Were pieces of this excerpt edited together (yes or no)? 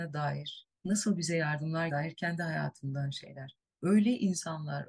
yes